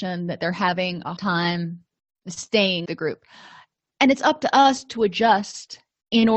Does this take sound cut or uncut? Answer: cut